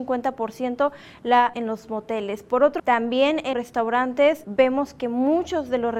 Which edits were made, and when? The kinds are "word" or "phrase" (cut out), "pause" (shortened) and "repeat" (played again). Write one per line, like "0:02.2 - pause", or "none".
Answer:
0:01.5 - word
0:02.8 - word
0:03.5 - word
0:04.4 - word